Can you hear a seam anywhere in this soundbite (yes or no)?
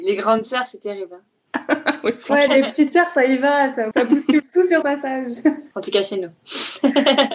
yes